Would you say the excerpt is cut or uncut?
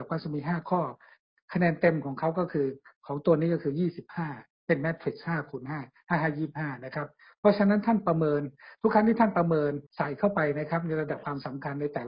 cut